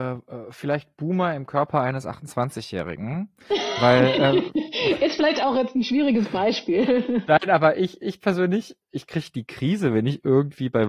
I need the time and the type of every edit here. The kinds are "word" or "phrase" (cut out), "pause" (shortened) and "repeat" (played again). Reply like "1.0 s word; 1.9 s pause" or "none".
8.0 s word